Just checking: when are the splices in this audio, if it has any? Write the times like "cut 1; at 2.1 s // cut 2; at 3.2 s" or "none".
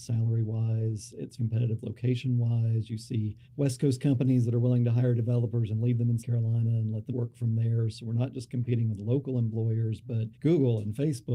cut 1; at 1.4 s // cut 2; at 3.4 s // cut 3; at 6.2 s // cut 4; at 7.1 s // cut 5; at 10.3 s